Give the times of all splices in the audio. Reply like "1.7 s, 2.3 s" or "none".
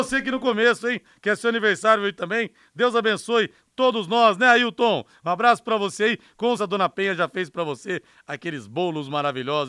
6.6 s